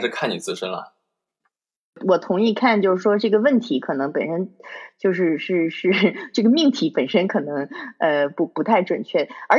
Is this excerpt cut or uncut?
uncut